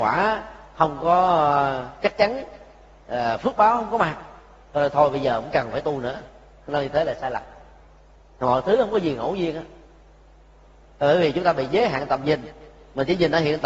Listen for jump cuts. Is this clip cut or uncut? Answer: uncut